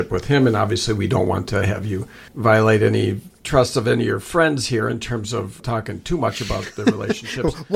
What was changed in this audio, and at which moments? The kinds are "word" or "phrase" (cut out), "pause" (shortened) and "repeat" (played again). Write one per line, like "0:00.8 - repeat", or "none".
0:02.3 - pause
0:05.6 - word